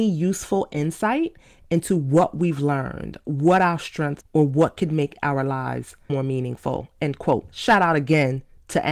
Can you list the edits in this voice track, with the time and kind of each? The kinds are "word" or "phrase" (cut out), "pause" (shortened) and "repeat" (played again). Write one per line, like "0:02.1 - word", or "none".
0:04.2 - word
0:06.1 - word